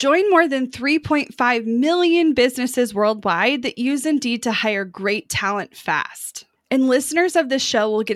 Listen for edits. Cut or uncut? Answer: uncut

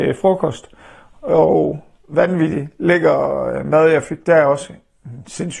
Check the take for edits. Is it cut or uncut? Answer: uncut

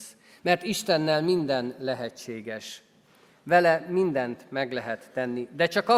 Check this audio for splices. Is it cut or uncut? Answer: uncut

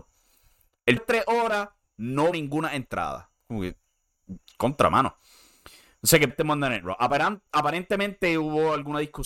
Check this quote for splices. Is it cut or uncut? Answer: cut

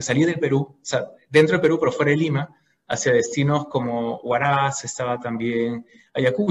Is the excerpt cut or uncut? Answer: uncut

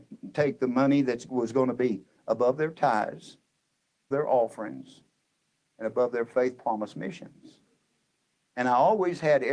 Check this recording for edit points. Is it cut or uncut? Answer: cut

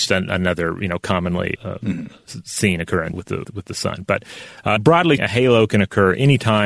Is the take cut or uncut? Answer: cut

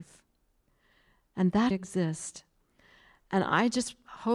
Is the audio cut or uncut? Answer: cut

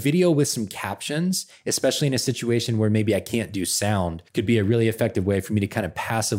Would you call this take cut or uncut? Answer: cut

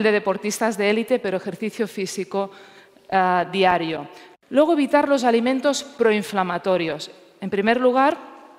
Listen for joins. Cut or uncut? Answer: uncut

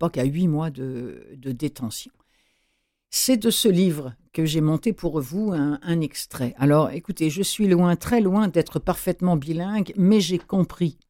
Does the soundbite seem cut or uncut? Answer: uncut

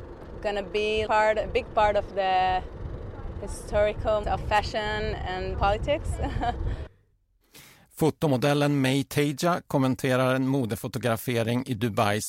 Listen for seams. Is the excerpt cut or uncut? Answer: cut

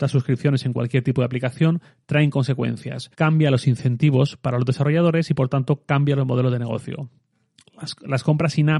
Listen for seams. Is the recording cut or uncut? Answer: cut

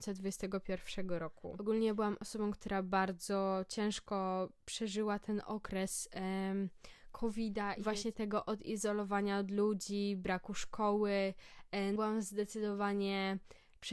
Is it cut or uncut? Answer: cut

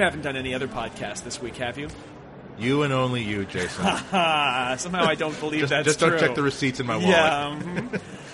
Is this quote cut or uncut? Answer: uncut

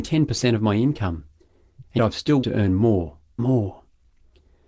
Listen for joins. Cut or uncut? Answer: cut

